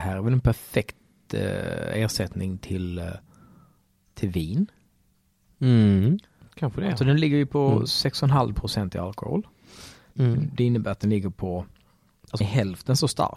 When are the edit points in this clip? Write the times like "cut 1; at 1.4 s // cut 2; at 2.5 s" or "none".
cut 1; at 12.4 s